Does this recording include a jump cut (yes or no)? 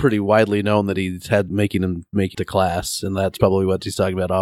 yes